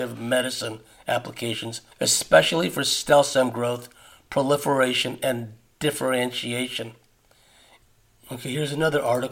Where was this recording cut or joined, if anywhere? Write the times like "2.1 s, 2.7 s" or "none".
1.9 s